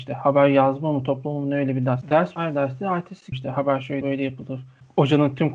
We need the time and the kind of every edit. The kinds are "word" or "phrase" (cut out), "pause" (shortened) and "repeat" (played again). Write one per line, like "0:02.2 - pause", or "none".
0:02.4 - word
0:03.3 - word
0:04.0 - word